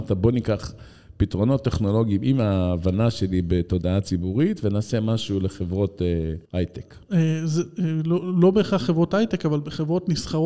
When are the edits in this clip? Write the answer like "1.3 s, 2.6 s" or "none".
6.5 s